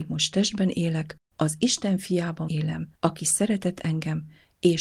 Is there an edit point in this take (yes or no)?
yes